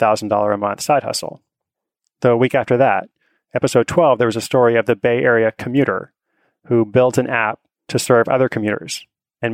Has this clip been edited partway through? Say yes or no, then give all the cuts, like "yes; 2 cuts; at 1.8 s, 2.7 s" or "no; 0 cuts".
no; 0 cuts